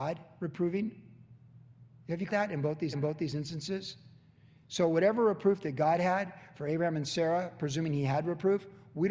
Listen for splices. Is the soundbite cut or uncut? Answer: cut